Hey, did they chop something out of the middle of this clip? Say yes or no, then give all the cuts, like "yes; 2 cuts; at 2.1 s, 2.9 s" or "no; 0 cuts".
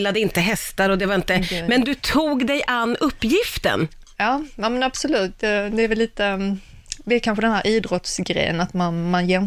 no; 0 cuts